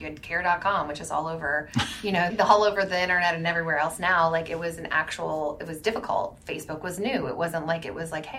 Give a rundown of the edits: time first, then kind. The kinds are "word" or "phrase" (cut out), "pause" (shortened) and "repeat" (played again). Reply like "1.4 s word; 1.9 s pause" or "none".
2.3 s word